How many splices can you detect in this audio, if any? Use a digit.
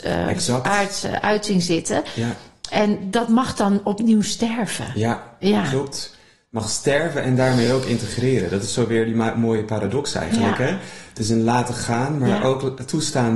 0